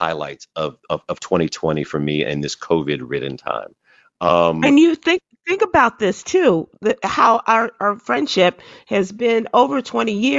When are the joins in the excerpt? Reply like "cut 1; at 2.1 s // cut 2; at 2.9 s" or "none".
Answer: none